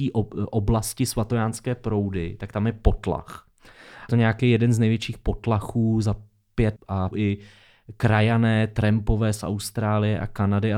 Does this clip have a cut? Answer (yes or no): yes